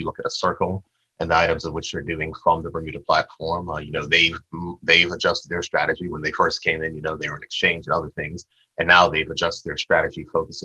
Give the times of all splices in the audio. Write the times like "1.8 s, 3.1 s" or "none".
none